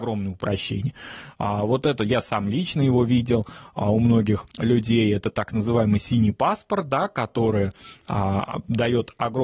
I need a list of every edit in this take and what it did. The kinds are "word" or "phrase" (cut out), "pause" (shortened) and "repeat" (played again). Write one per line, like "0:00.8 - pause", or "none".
0:04.5 - pause